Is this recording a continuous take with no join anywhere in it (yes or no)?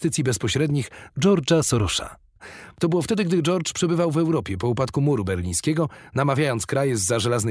yes